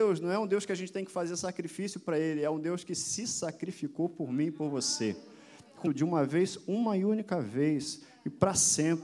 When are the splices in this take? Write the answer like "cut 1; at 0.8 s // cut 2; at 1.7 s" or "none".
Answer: cut 1; at 5.8 s